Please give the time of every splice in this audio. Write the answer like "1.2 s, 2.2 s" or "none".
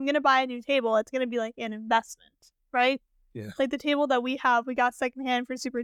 none